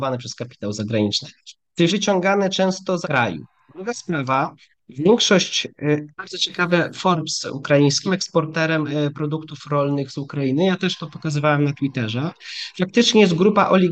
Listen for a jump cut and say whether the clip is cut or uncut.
cut